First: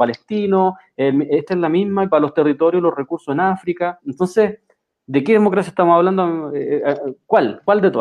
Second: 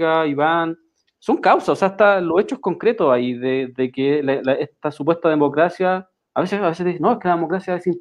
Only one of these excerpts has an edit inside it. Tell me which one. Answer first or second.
first